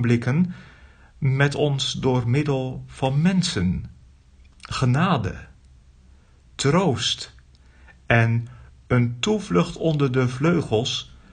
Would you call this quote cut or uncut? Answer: uncut